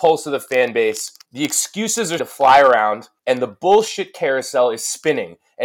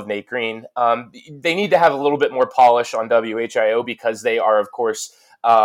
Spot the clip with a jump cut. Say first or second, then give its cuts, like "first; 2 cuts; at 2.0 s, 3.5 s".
first; 3 cuts; at 1.2 s, 2.2 s, 3.2 s